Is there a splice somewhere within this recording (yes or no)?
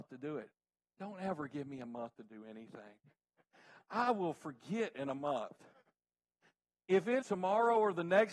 yes